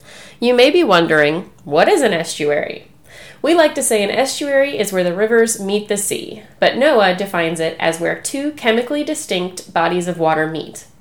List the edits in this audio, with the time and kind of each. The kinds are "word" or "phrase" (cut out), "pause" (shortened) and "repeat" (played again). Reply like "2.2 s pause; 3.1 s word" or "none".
none